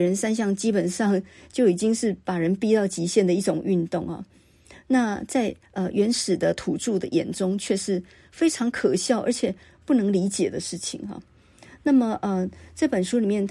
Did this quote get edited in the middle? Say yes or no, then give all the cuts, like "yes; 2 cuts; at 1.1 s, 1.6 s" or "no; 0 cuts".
no; 0 cuts